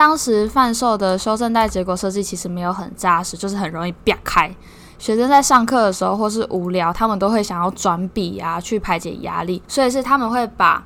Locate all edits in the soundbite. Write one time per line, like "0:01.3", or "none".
0:09.6